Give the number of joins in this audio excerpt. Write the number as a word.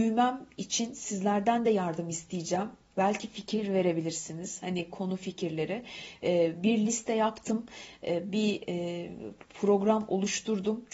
zero